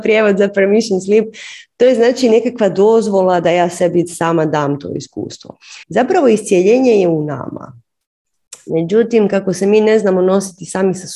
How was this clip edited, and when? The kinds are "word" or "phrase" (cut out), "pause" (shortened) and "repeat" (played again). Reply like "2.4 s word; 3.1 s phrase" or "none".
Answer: 5.8 s pause